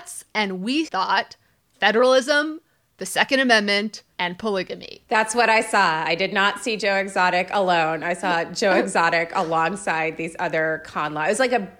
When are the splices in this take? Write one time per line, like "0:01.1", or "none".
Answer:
0:04.1